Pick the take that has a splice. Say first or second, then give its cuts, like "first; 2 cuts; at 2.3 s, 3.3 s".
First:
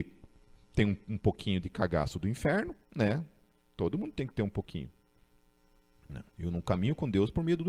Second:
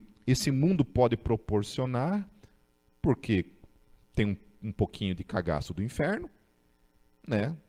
first; 3 cuts; at 1.0 s, 2.8 s, 6.3 s